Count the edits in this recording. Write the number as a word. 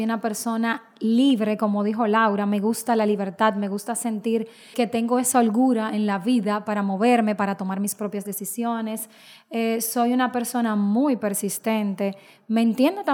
one